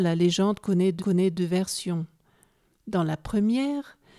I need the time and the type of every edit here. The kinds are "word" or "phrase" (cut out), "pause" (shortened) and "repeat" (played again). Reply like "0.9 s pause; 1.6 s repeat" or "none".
1.0 s repeat